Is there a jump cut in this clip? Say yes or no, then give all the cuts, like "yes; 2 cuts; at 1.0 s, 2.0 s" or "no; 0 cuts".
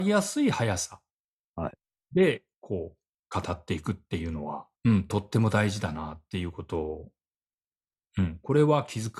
yes; 1 cut; at 4.7 s